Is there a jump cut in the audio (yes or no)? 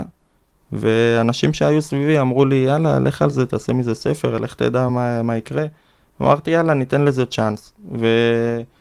no